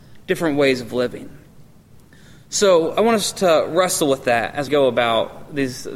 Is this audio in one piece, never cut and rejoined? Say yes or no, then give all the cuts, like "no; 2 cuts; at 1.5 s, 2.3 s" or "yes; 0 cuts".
no; 1 cut; at 4.7 s